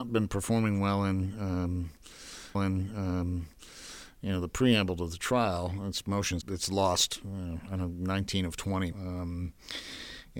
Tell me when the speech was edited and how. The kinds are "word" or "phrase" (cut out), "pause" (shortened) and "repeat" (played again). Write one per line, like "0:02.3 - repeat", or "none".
0:02.5 - repeat
0:06.4 - word
0:08.9 - word